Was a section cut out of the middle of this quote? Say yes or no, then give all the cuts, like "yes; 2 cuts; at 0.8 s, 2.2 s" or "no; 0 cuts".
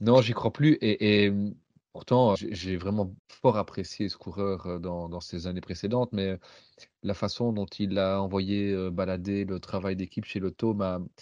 yes; 2 cuts; at 2.4 s, 3.2 s